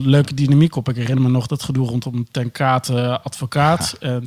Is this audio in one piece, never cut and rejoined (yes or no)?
yes